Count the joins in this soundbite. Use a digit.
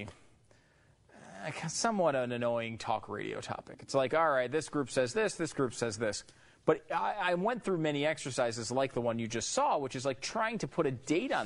0